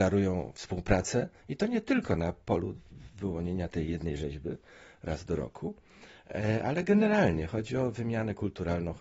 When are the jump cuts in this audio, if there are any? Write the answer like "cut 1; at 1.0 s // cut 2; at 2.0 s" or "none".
none